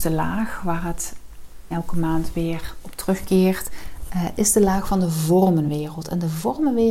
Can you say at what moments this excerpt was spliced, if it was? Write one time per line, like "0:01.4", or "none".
0:01.7